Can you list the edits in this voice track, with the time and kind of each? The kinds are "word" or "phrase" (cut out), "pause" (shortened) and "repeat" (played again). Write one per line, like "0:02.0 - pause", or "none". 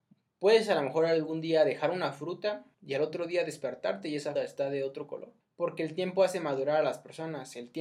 0:02.7 - pause
0:04.4 - word
0:05.4 - pause